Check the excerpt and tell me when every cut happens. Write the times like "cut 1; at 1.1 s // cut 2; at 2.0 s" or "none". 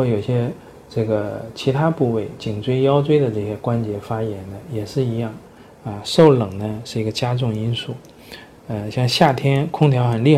none